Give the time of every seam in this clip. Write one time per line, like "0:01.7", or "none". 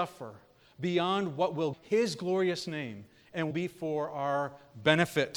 0:01.7
0:03.5